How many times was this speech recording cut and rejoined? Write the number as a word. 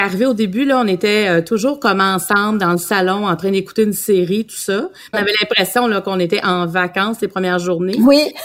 one